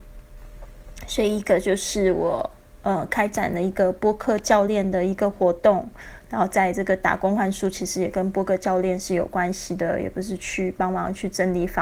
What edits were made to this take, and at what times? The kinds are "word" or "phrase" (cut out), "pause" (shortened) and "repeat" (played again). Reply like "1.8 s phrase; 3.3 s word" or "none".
none